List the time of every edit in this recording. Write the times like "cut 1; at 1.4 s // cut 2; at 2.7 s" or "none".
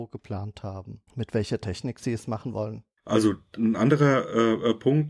cut 1; at 1.1 s